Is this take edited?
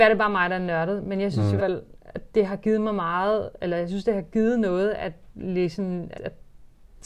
yes; 3 cuts; at 1.6 s, 2.3 s, 6.1 s

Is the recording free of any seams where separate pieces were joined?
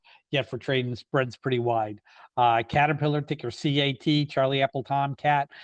yes; 0 cuts

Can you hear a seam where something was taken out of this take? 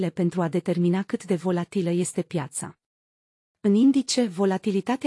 no; 0 cuts

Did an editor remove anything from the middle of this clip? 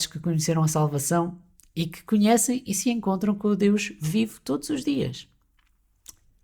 no; 0 cuts

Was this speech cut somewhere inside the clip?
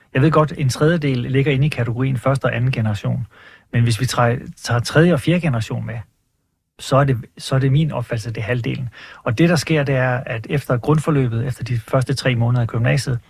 no; 0 cuts

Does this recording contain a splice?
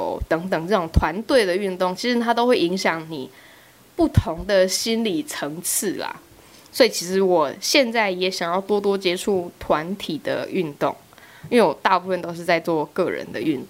no; 0 cuts

